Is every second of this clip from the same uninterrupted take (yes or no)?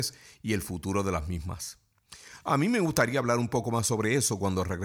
yes